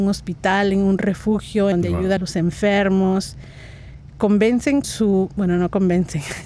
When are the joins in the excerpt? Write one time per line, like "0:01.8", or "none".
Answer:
0:01.7
0:02.2
0:04.8